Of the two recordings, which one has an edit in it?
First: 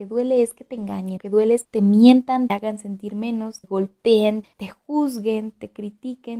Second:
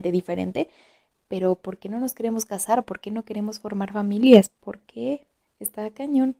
first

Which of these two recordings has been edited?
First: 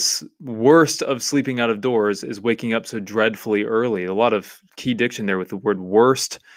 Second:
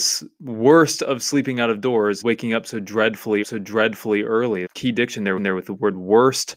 second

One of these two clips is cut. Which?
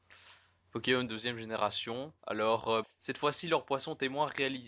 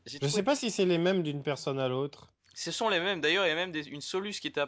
first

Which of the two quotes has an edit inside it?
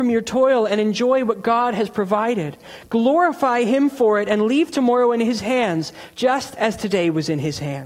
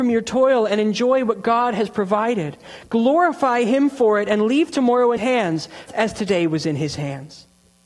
second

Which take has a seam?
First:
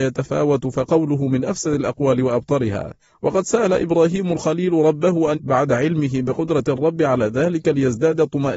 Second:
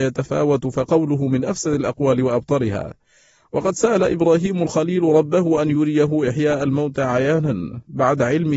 first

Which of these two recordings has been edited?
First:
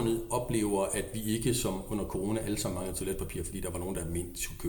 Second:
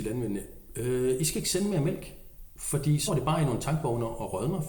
second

